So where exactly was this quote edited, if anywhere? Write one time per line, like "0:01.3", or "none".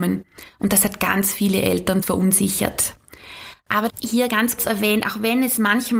0:02.0
0:03.9
0:04.6

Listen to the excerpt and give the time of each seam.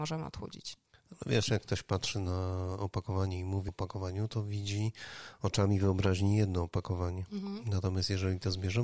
0:03.7

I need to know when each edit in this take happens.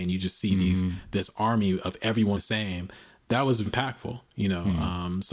0:02.4
0:03.7

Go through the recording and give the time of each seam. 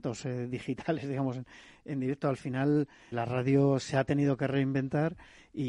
0:03.1

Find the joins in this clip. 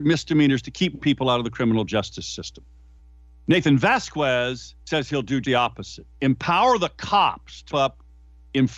0:01.0
0:03.0
0:04.8
0:05.4
0:06.1
0:07.7

